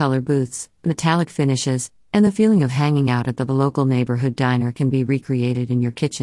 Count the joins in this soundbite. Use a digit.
0